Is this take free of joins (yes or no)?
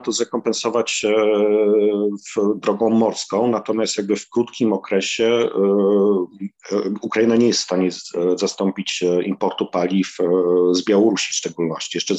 yes